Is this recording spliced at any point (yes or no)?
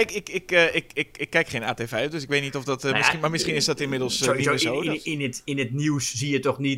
no